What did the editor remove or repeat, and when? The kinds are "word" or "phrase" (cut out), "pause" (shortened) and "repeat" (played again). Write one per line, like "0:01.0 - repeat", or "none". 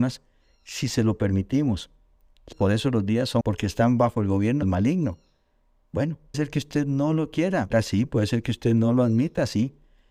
0:02.5 - word
0:03.4 - word
0:04.6 - word
0:06.3 - word
0:07.7 - word